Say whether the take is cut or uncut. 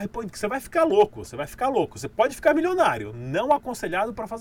uncut